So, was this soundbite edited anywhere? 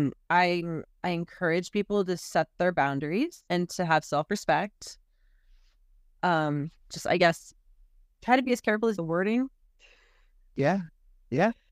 yes; 3 cuts; at 3.5 s, 6.8 s, 9.0 s

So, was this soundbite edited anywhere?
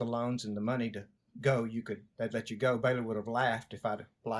no; 0 cuts

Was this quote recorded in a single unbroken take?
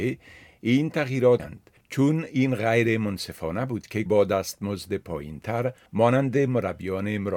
no; 2 cuts; at 1.4 s, 4.1 s

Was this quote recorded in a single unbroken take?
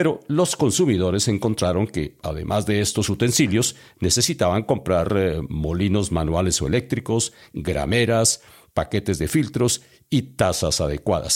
yes; 0 cuts

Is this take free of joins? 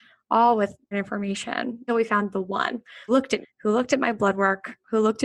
no; 4 cuts; at 0.9 s, 1.9 s, 3.1 s, 3.4 s

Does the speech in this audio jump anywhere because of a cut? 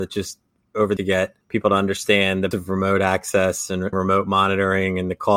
yes; 4 cuts; at 1.0 s, 1.4 s, 2.5 s, 3.9 s

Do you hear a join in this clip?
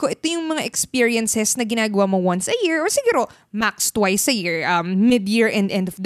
no; 0 cuts

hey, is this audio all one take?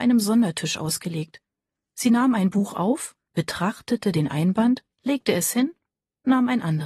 no; 2 cuts; at 3.2 s, 4.9 s

